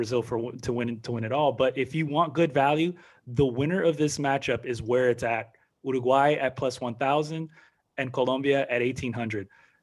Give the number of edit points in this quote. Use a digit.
0